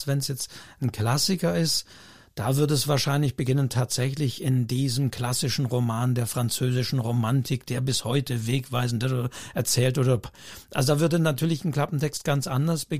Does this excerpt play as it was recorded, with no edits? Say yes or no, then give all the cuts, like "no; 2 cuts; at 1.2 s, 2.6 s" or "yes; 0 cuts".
yes; 0 cuts